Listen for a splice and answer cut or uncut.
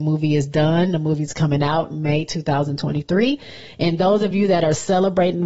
uncut